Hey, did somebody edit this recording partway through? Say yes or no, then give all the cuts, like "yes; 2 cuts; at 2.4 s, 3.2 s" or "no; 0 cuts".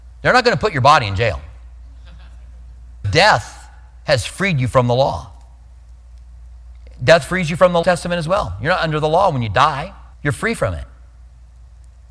yes; 3 cuts; at 3.0 s, 7.8 s, 10.1 s